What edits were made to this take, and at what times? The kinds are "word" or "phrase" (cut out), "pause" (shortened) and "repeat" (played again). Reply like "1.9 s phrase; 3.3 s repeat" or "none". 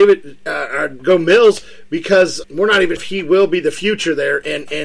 2.4 s word; 3.0 s word